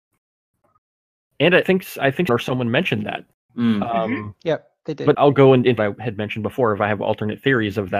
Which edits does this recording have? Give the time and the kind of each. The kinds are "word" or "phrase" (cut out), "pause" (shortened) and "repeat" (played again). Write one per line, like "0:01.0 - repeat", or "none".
0:01.6 - word
0:02.3 - word
0:05.1 - word
0:05.8 - word